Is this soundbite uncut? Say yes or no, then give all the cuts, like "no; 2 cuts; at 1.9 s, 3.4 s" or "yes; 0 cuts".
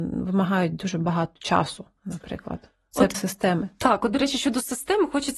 no; 1 cut; at 3.1 s